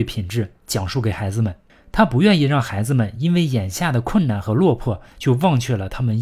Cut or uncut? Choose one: uncut